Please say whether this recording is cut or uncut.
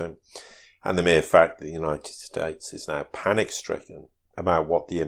uncut